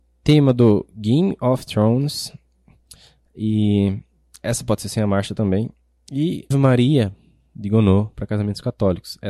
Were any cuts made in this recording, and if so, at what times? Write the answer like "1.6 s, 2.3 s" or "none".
6.5 s